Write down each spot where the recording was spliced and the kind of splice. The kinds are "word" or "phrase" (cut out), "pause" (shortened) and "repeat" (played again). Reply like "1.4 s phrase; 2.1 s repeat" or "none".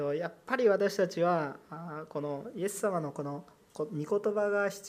none